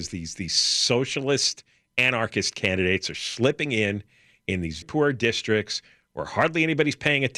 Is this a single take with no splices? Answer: no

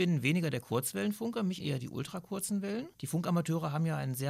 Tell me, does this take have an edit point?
yes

